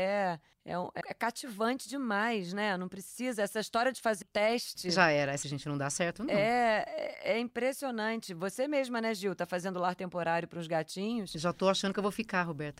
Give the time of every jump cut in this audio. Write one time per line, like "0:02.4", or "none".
0:01.0
0:04.2
0:05.4